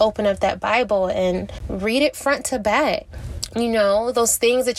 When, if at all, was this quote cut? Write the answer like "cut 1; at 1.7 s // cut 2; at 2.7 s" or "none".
none